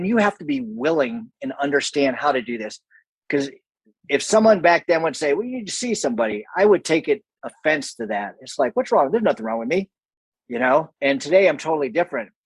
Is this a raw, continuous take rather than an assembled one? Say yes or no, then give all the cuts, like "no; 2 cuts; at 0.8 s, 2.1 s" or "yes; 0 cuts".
yes; 0 cuts